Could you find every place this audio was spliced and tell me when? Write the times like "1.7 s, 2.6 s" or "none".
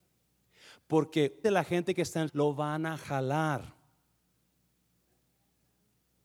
1.4 s, 2.3 s